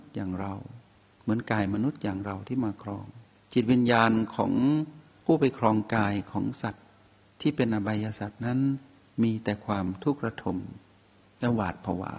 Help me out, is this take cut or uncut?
cut